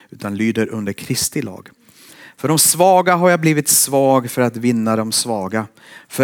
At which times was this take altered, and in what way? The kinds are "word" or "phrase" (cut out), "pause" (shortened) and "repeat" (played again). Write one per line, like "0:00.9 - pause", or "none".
none